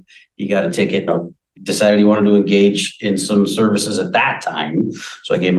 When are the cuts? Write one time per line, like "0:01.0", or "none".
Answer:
0:01.1
0:01.6